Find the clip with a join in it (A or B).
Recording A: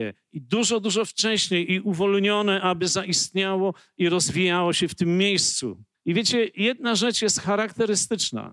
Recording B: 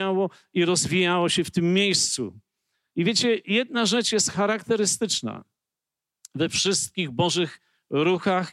A